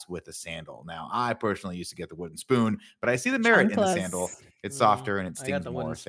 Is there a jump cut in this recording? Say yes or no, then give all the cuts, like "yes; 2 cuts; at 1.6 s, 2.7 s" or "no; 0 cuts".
no; 0 cuts